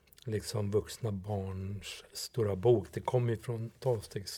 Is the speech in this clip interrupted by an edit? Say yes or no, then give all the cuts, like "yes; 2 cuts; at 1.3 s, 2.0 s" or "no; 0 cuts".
no; 0 cuts